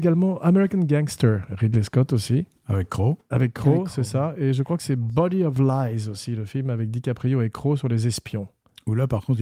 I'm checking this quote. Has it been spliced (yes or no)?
no